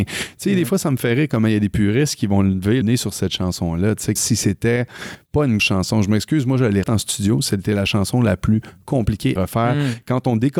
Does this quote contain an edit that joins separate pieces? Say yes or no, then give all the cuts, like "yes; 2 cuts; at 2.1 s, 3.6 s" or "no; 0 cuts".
yes; 5 cuts; at 2.8 s, 4.2 s, 5.6 s, 6.8 s, 9.4 s